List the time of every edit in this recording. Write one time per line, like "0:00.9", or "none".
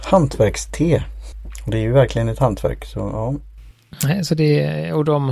none